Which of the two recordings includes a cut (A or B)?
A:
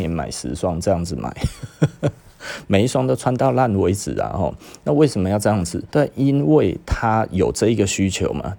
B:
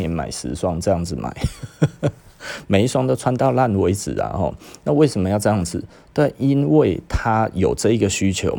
A